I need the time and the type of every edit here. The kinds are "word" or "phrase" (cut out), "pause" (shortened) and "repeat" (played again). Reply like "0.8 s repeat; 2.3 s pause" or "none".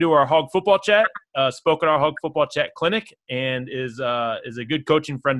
none